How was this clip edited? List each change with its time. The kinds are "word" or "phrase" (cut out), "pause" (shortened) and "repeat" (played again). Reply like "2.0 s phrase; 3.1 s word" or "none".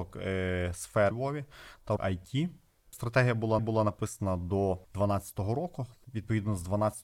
1.1 s phrase; 2.0 s word; 3.6 s repeat